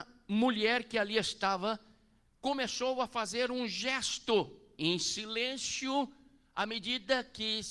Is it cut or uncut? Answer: uncut